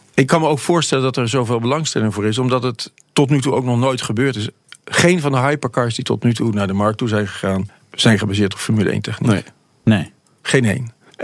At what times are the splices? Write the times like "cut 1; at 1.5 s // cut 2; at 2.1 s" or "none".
none